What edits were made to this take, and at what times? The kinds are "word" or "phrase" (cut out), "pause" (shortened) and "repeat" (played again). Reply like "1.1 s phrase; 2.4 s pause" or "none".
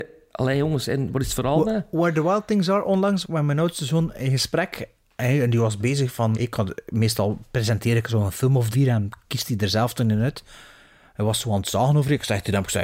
3.2 s word; 6.3 s word; 8.7 s word